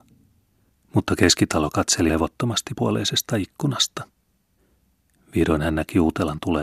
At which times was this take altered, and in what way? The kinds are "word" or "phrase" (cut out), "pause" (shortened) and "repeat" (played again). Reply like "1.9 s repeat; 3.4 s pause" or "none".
2.1 s word; 2.7 s word